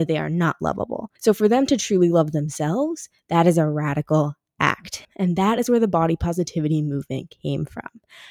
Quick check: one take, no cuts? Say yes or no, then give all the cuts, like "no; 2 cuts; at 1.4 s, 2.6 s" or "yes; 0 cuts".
no; 2 cuts; at 1.2 s, 5.0 s